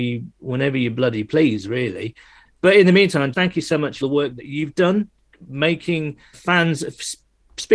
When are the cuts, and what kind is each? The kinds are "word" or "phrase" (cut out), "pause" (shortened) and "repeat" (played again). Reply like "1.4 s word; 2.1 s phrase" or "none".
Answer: 2.4 s word; 3.3 s word; 4.0 s word; 6.3 s word